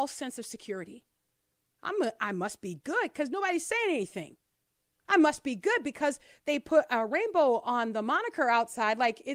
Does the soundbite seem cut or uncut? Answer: uncut